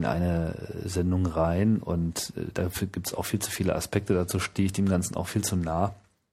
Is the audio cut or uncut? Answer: uncut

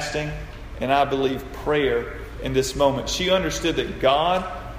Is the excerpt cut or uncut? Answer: uncut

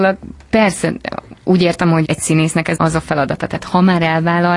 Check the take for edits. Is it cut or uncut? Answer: cut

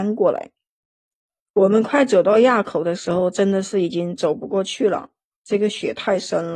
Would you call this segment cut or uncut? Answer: uncut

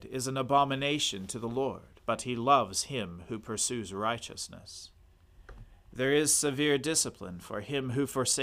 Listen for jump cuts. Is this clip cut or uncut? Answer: cut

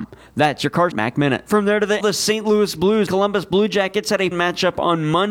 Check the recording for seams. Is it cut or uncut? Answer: cut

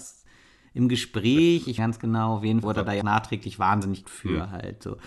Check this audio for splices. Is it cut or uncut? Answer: cut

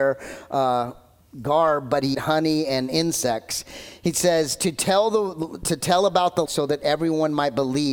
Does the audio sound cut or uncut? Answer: cut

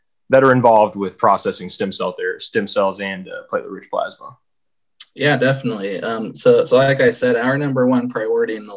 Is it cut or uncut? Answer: uncut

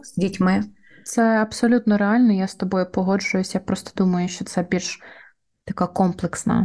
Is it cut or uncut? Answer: uncut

